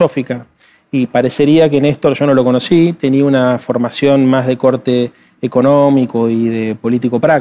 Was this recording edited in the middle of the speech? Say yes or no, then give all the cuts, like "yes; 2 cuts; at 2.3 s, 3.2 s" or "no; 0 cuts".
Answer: no; 0 cuts